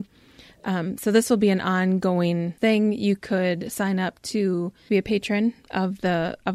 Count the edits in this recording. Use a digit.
2